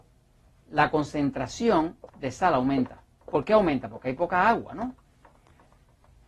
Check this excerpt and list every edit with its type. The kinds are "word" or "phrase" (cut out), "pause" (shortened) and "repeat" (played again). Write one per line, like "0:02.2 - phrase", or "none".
0:02.1 - pause